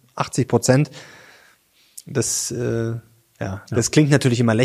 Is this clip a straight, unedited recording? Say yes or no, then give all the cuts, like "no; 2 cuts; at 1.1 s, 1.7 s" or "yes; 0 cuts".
yes; 0 cuts